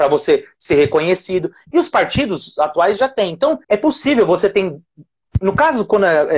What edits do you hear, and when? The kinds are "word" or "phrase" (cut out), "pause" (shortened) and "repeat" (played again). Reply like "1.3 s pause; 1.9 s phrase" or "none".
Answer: 3.6 s pause